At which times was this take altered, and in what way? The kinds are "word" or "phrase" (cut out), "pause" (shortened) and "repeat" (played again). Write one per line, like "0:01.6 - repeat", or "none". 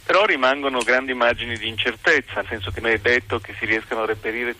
0:02.4 - word
0:02.8 - word

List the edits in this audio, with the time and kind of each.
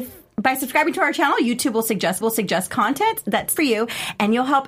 0:02.2 - repeat
0:03.6 - phrase

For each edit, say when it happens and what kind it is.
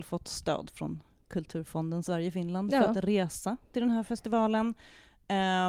none

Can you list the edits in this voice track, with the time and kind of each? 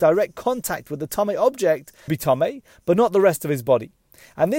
0:02.1 - word

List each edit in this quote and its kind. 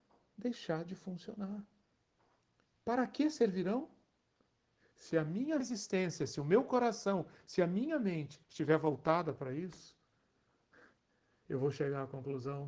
0:05.6 - phrase
0:08.4 - pause

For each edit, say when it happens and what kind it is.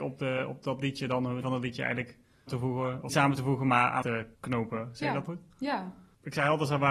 0:01.4 - word
0:02.5 - phrase
0:03.1 - word
0:04.0 - word
0:04.3 - pause
0:05.3 - word

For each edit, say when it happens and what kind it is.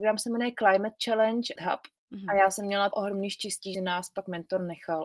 0:01.6 - phrase
0:02.0 - pause
0:02.9 - word
0:03.7 - word

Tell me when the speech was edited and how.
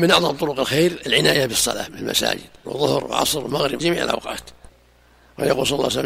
0:02.6 - word
0:03.8 - word

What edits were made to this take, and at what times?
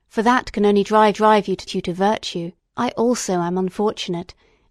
0:01.1 - repeat
0:01.7 - phrase
0:02.6 - pause

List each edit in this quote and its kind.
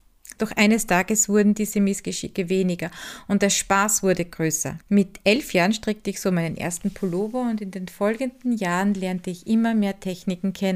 0:04.8 - pause

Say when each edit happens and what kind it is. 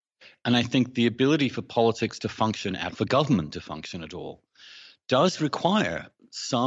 0:02.9 - word

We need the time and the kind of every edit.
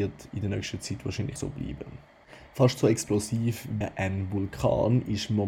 0:01.4 - word
0:03.8 - word

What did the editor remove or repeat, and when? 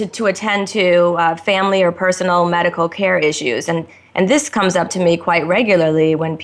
none

